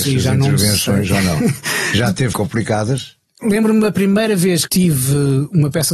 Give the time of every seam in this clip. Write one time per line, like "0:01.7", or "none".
0:02.3
0:04.7